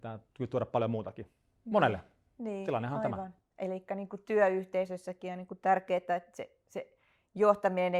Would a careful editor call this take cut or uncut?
uncut